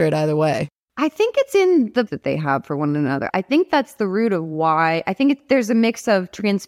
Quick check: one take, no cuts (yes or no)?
no